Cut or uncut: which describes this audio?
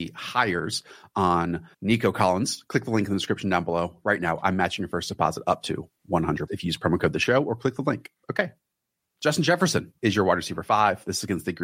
cut